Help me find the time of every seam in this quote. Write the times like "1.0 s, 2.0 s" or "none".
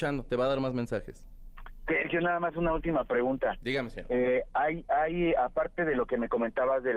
none